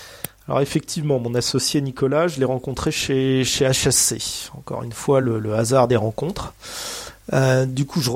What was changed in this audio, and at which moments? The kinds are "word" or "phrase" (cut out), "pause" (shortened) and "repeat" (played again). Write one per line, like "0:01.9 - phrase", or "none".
none